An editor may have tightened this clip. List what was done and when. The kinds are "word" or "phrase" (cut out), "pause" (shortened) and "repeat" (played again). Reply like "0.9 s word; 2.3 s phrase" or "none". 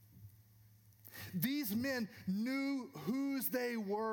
none